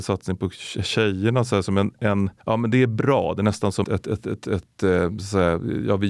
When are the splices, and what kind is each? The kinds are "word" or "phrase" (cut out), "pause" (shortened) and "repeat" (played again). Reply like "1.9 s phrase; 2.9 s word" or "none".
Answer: 2.4 s pause; 3.8 s word

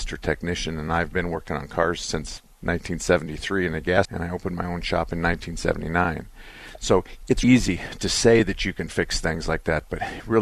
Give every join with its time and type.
4.0 s word; 7.4 s word

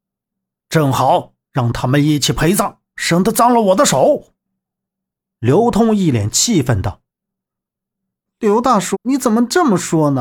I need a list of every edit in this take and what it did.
8.9 s word

